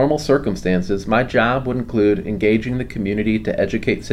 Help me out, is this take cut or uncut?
uncut